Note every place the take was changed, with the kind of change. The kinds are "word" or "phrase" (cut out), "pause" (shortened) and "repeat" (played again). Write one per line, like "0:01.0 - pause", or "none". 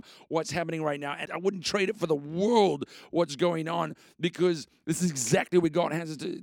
0:01.3 - word